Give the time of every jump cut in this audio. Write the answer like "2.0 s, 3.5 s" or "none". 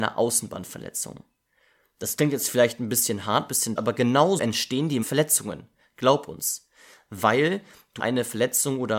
3.8 s, 4.4 s, 5.0 s, 8.0 s

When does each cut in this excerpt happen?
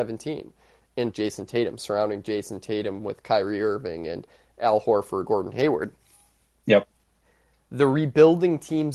1.1 s, 5.3 s

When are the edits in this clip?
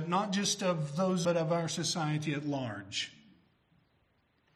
1.2 s

